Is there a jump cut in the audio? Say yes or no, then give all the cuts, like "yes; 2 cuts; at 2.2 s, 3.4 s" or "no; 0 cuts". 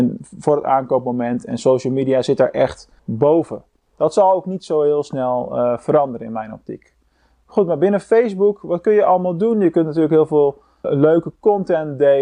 yes; 2 cuts; at 3.0 s, 10.8 s